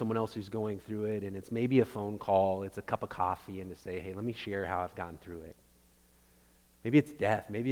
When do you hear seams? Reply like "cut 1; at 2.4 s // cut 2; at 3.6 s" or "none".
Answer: none